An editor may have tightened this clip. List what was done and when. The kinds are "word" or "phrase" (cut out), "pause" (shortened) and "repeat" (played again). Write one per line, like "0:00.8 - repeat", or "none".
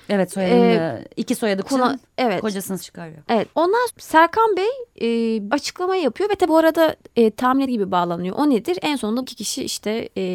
0:01.6 - word
0:02.8 - word
0:03.5 - word
0:03.9 - word
0:05.5 - word
0:06.5 - word
0:07.7 - word
0:09.2 - word